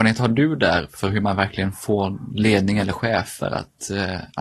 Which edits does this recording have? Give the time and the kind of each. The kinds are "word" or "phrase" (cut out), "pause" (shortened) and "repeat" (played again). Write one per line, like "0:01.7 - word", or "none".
none